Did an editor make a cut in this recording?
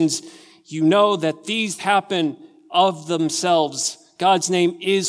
yes; 1 cut; at 1.8 s

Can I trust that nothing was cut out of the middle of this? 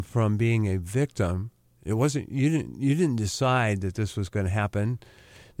yes; 0 cuts

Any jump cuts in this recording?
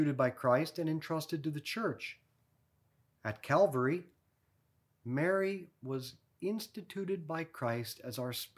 no; 0 cuts

